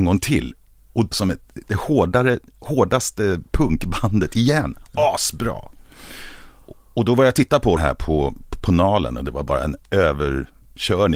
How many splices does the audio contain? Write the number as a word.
two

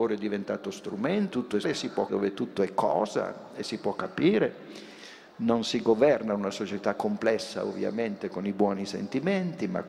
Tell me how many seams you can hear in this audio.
three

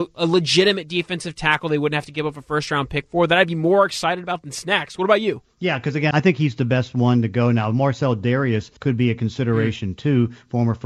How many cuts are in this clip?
two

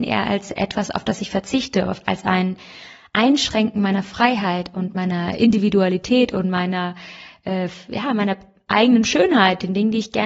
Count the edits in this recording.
zero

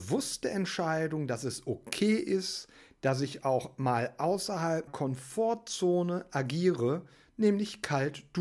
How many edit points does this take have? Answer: one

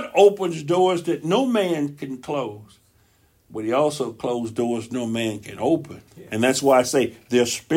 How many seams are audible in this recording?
one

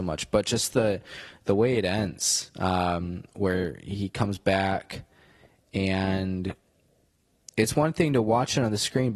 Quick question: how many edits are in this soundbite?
zero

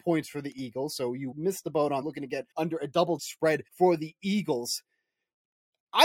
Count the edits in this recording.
five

